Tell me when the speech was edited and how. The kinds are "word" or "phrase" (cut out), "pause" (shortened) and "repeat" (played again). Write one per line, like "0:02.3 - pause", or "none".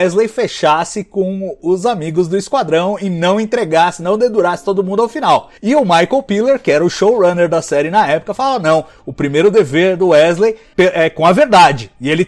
0:05.6 - pause
0:10.7 - word